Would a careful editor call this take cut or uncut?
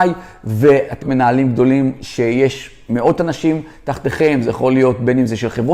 cut